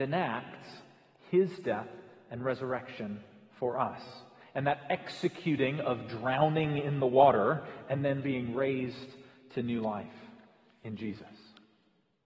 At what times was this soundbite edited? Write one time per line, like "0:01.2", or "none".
none